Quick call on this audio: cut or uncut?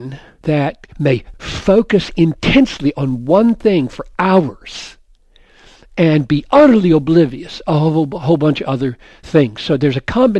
uncut